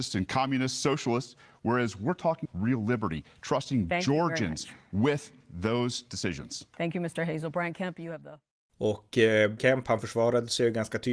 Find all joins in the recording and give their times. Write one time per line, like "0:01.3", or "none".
0:02.5
0:09.6